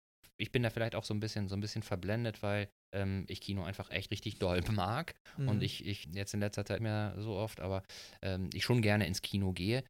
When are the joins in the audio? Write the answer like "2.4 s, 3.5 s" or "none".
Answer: 2.8 s, 4.1 s, 6.0 s, 6.8 s

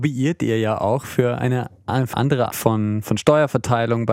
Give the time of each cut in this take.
2.1 s, 2.5 s

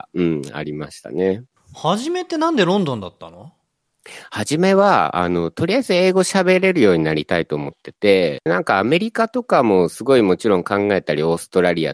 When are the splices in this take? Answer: 8.5 s

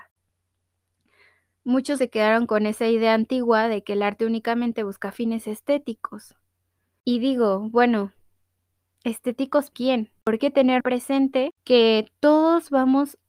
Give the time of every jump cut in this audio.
2.0 s, 9.7 s, 10.4 s, 10.8 s

